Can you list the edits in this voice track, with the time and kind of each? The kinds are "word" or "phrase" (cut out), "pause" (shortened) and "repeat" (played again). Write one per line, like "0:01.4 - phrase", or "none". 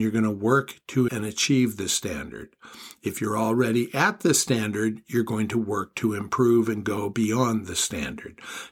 0:01.1 - word